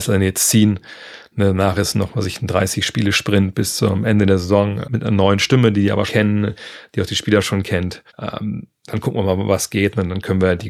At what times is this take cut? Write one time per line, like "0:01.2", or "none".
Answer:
0:04.8
0:06.1
0:08.1